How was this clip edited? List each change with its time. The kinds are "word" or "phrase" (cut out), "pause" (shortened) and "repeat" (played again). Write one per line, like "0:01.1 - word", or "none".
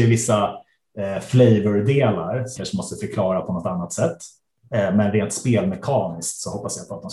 0:02.6 - word

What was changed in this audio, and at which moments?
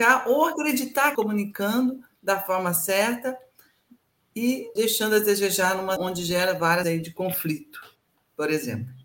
0:01.1 - phrase
0:04.8 - word
0:06.0 - word
0:06.8 - word

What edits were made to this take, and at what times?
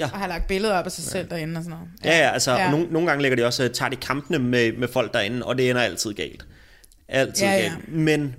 none

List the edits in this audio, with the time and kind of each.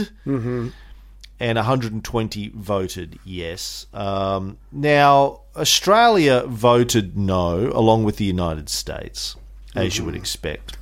none

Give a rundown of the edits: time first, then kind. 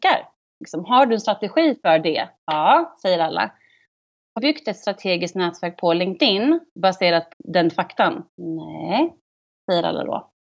0:04.4 - word
0:07.3 - word
0:08.3 - pause

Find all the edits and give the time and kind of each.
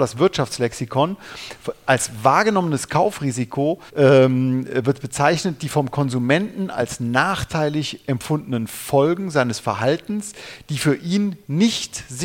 0:03.9 - pause

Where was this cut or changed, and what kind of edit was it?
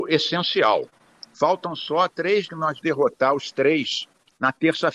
0:02.5 - word
0:02.8 - word

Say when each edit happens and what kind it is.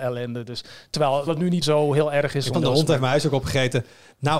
0:01.3 - word
0:01.6 - word
0:02.5 - word

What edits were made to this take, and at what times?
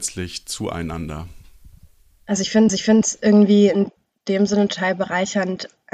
0:02.7 - repeat

